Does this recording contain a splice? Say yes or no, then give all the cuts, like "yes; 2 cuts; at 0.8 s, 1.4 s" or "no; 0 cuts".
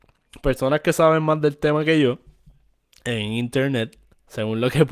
no; 0 cuts